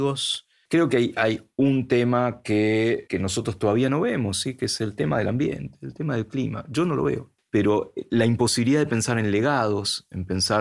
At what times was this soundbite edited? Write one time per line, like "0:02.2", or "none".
0:03.1